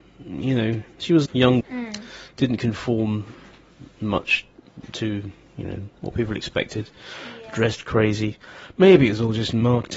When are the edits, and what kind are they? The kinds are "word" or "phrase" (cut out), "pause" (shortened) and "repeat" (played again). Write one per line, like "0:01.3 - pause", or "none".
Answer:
0:01.3 - phrase
0:01.6 - word
0:05.9 - pause

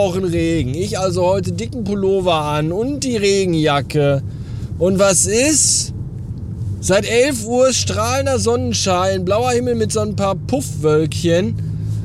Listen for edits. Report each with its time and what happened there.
none

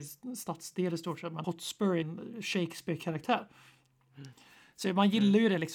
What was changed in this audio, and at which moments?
0:01.4 - word
0:02.0 - word

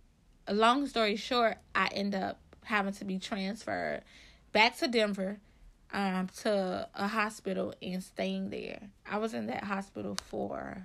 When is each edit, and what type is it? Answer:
0:09.0 - pause

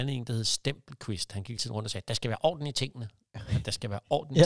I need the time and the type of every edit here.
0:01.6 - word

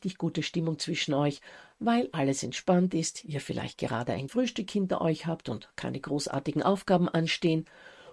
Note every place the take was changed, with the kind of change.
0:04.3 - word

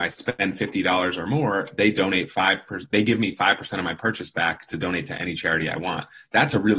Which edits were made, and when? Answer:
none

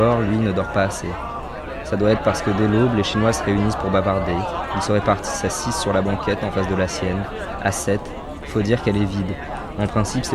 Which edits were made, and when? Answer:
none

